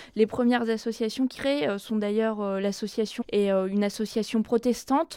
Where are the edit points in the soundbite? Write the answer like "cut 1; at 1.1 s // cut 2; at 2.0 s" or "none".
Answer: cut 1; at 1.3 s // cut 2; at 3.2 s